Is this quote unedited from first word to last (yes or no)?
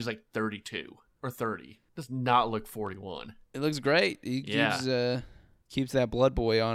yes